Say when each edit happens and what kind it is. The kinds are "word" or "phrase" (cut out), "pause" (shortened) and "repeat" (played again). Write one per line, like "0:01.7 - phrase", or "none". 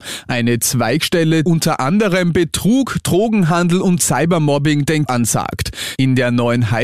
0:01.4 - word
0:05.1 - word